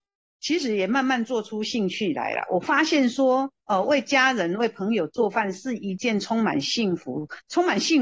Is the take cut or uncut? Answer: cut